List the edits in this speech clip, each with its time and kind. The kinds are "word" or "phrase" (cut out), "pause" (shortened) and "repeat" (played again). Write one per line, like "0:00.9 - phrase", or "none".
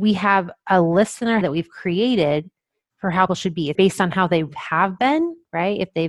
0:01.4 - word
0:03.3 - word
0:03.7 - word